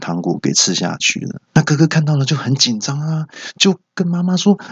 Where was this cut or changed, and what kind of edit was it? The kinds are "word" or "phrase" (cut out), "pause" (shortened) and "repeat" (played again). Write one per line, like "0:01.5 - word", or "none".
0:01.5 - pause